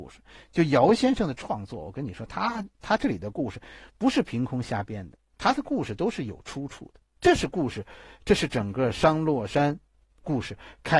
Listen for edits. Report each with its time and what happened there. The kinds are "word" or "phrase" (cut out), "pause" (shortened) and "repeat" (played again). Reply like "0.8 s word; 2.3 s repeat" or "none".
7.1 s pause